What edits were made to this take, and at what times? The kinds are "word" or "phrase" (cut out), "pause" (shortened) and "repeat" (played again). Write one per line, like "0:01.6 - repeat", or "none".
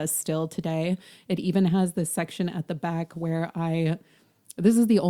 none